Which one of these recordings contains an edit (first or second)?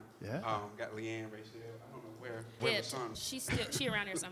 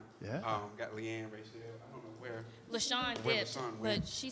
first